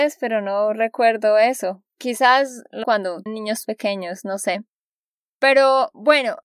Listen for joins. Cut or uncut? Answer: cut